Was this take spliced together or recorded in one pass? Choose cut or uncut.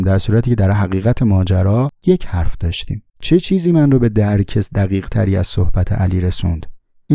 cut